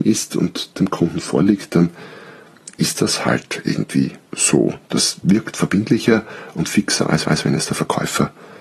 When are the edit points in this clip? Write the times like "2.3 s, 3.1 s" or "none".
4.3 s, 7.2 s